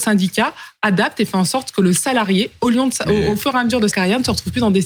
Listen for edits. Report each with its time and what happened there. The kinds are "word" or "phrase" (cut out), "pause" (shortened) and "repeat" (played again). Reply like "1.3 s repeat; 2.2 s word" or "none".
3.9 s word